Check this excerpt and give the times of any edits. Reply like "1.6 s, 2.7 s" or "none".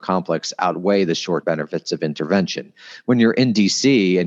1.4 s